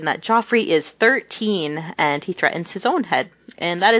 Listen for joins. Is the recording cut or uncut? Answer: uncut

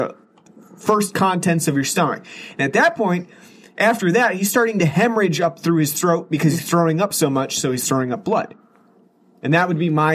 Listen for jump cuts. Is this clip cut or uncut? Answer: uncut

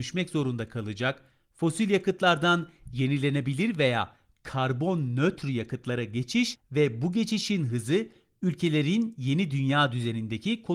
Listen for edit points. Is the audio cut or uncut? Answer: uncut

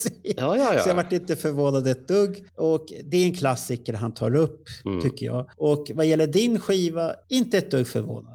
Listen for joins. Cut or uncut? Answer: cut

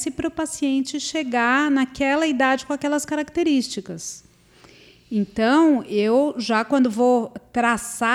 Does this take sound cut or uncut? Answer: uncut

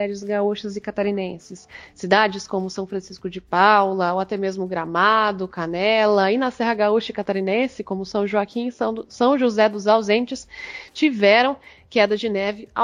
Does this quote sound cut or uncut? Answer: uncut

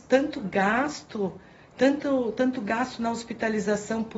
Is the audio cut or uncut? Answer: uncut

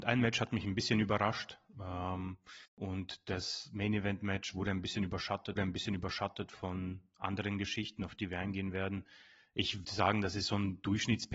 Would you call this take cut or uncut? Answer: cut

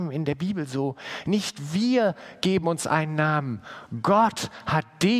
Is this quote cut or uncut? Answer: uncut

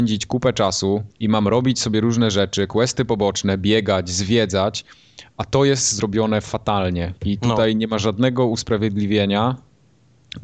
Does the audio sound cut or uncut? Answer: cut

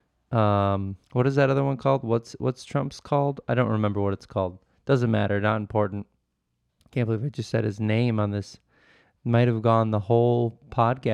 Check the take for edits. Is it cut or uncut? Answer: cut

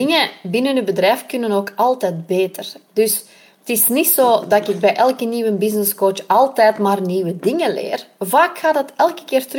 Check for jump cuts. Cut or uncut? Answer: uncut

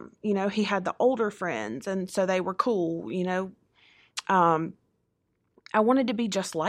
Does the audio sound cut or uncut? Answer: uncut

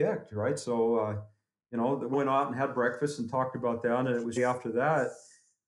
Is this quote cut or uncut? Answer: cut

